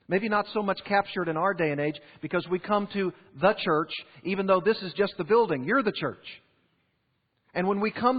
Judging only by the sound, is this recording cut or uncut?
uncut